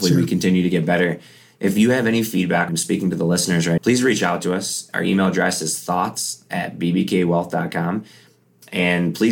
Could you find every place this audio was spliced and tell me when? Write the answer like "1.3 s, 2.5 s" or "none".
2.7 s, 3.8 s